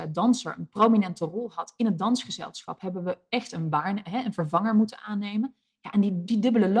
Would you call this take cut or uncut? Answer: uncut